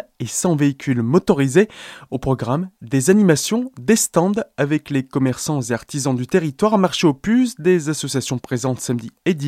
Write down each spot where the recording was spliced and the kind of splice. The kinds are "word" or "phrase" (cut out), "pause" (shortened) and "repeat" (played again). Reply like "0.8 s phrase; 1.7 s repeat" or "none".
none